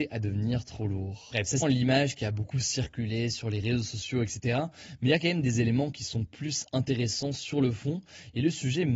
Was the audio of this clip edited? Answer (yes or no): yes